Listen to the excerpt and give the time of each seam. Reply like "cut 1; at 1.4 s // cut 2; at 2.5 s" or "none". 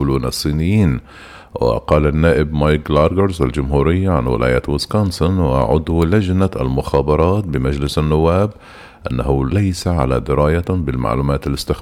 none

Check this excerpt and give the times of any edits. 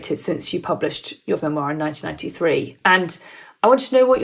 cut 1; at 1.4 s

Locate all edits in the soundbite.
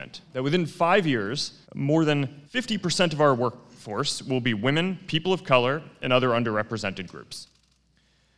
cut 1; at 1.6 s // cut 2; at 2.5 s

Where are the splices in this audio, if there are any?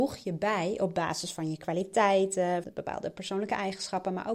cut 1; at 2.6 s

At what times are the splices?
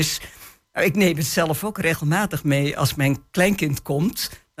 none

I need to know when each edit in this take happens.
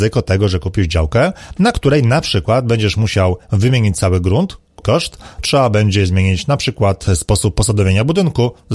cut 1; at 4.8 s // cut 2; at 5.4 s

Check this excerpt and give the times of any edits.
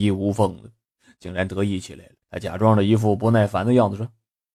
cut 1; at 2.2 s

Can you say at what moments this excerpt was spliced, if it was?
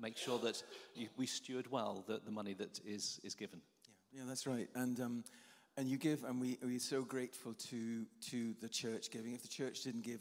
none

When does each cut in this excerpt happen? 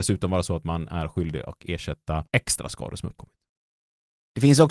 cut 1; at 2.3 s

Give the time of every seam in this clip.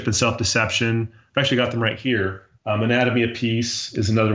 cut 1; at 2.5 s

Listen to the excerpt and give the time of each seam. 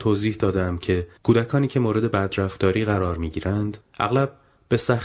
cut 1; at 1.2 s // cut 2; at 3.8 s

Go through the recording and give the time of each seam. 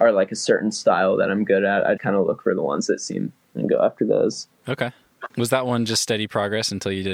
cut 1; at 2.0 s // cut 2; at 3.4 s // cut 3; at 5.3 s

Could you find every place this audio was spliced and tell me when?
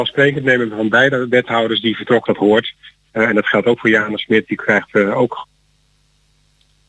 cut 1; at 2.3 s

